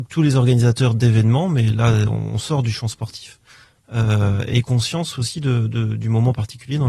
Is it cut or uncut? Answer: uncut